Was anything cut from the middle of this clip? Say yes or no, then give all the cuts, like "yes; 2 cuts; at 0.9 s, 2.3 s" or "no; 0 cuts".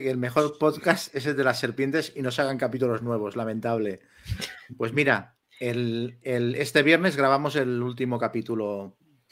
no; 0 cuts